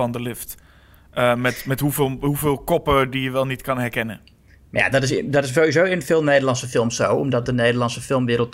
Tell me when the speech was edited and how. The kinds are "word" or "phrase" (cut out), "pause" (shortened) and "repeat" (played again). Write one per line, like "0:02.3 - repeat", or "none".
none